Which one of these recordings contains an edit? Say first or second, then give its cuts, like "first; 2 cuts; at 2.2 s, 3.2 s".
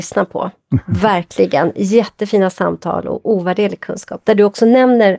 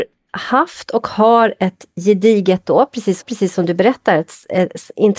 second; 1 cut; at 3.2 s